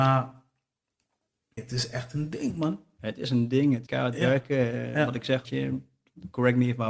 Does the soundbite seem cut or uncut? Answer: cut